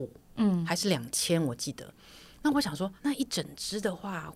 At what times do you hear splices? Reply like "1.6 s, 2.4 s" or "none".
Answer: 3.0 s